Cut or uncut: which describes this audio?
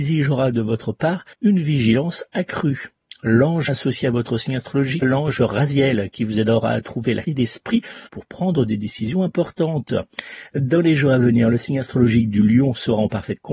cut